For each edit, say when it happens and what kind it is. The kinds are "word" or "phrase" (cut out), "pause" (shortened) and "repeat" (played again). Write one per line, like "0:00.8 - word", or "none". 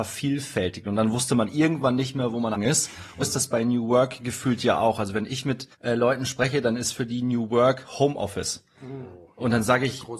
0:02.5 - word
0:03.2 - word
0:05.7 - pause

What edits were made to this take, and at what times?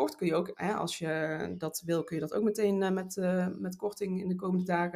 none

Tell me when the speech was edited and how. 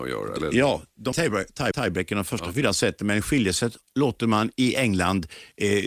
0:01.1 - word
0:01.7 - repeat

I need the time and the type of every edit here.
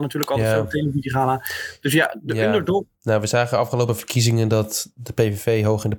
none

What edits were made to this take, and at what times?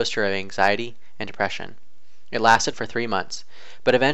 0:02.7 - word

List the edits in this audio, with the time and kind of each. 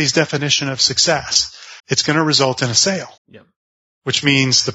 0:01.8 - pause
0:03.2 - pause

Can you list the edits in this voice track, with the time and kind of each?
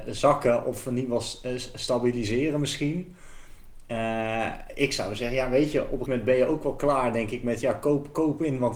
0:06.1 - word

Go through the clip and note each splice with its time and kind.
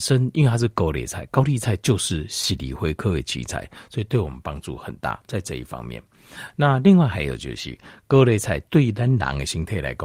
0:08.7 - pause

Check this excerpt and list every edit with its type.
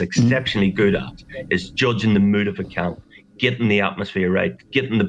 none

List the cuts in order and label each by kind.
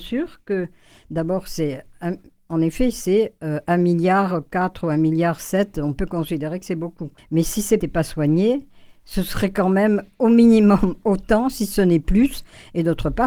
0:07.2 - pause
0:07.8 - phrase

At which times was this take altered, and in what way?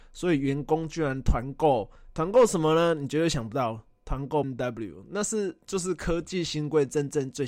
0:04.4 - word

